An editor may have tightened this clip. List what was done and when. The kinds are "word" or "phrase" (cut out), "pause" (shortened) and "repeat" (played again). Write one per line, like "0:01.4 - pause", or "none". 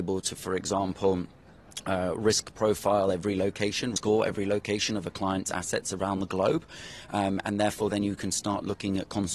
0:04.0 - word

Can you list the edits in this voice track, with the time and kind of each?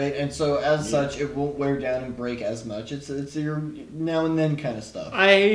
none

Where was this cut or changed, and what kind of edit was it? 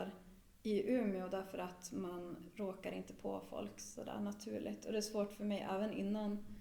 none

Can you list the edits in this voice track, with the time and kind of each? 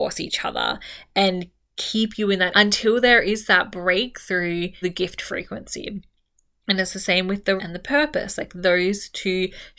0:02.5 - word
0:04.8 - word
0:07.6 - word

